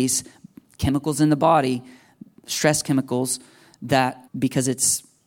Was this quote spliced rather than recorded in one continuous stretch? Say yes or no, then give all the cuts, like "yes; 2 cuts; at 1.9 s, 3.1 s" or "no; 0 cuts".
yes; 1 cut; at 4.3 s